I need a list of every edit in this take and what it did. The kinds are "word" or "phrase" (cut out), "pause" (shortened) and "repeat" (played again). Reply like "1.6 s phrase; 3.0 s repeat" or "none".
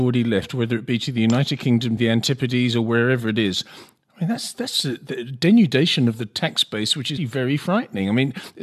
2.0 s word; 7.2 s word

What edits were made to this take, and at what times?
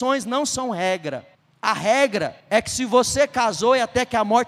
1.3 s pause; 2.4 s pause

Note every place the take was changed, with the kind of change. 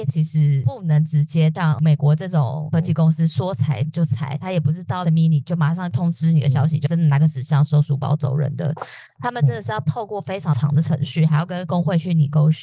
5.0 s word

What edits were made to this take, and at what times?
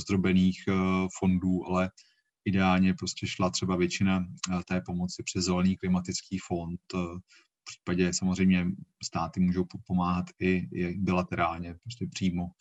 none

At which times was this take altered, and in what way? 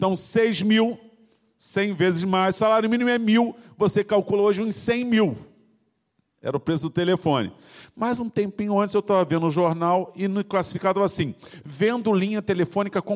none

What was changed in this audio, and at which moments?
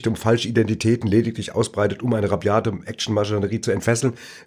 none

